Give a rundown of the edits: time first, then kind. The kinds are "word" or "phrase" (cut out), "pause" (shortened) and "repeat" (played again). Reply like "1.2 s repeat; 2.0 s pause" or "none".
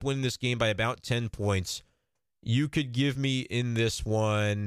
none